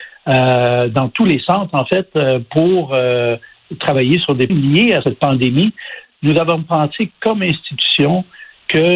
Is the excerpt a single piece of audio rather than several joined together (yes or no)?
no